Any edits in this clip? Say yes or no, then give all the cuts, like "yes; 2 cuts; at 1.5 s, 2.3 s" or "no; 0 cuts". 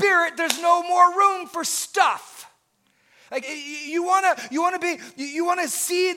yes; 1 cut; at 3.4 s